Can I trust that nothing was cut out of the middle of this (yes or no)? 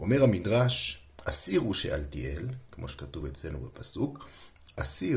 yes